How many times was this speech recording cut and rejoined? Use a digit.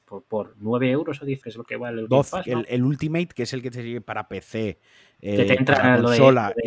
1